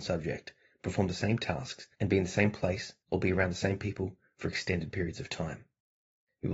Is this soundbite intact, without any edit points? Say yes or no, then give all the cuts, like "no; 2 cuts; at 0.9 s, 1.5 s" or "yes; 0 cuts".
no; 2 cuts; at 1.9 s, 3.0 s